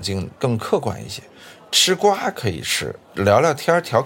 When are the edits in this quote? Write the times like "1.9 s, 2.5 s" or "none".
3.0 s